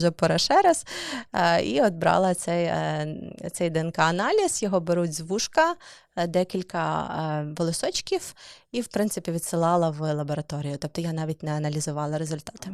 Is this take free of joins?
yes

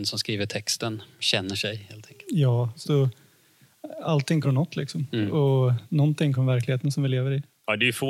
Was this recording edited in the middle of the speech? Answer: yes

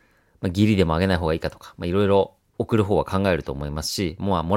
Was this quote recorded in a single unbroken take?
no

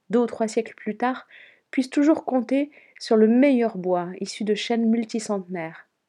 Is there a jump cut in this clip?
no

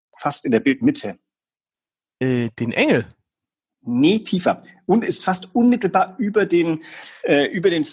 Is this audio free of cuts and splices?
yes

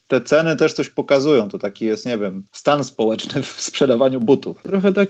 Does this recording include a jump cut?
no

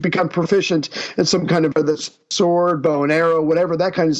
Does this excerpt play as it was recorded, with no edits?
no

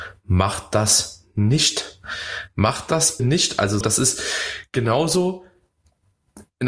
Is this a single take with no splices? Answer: no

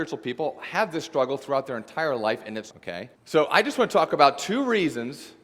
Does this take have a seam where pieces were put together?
yes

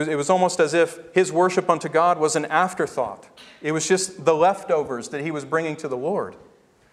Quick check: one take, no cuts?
yes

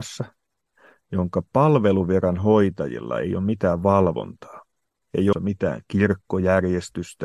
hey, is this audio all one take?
no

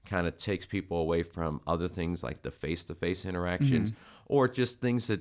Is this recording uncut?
yes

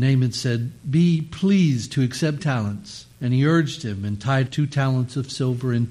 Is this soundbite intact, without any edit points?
no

